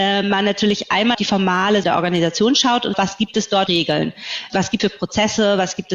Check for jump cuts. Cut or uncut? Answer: cut